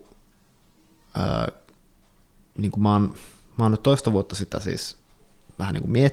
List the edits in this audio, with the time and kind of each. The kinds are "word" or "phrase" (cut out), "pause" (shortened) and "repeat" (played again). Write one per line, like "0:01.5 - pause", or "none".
none